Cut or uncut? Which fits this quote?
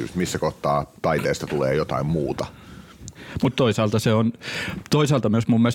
uncut